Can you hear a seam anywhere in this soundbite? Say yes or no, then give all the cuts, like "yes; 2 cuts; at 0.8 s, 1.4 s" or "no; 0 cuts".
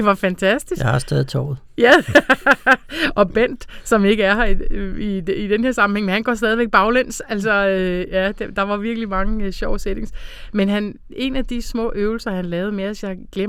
no; 0 cuts